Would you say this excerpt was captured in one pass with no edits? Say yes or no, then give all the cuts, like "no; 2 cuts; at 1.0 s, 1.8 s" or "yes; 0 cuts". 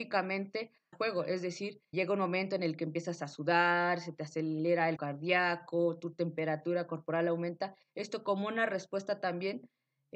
no; 3 cuts; at 0.9 s, 1.9 s, 5.0 s